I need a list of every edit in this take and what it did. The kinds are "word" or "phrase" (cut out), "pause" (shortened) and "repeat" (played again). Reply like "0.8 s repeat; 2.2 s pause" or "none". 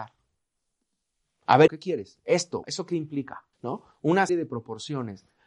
1.7 s word; 2.6 s word; 3.5 s pause; 4.3 s word

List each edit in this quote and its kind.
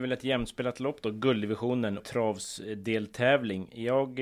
2.0 s word

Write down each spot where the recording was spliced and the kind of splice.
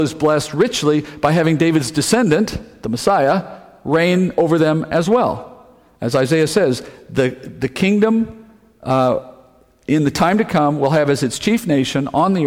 none

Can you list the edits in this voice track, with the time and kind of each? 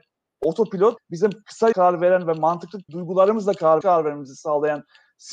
1.0 s word; 1.7 s word; 2.9 s word; 3.8 s phrase

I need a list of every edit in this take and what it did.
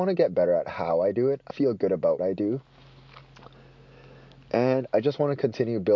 1.5 s word; 2.2 s word

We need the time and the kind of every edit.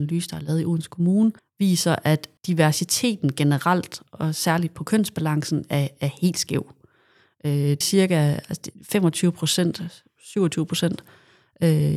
1.4 s pause; 2.4 s pause; 7.8 s word

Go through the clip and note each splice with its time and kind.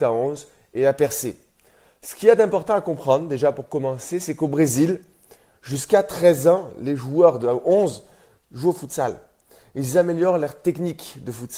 none

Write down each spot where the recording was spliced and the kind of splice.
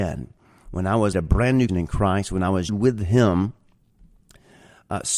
1.1 s word; 1.7 s word; 2.7 s word

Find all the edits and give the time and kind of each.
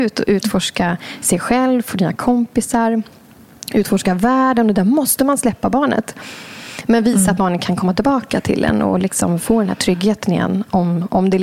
none

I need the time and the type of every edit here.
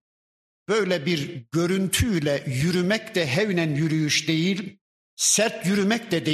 5.0 s pause

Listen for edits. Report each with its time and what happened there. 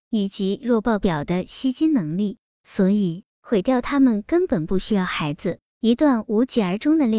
3.3 s pause

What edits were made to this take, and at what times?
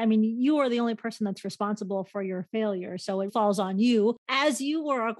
3.3 s word

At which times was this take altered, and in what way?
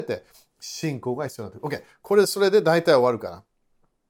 none

